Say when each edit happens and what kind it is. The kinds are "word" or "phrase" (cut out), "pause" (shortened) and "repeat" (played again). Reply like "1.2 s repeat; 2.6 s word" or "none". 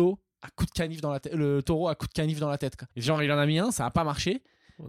2.9 s pause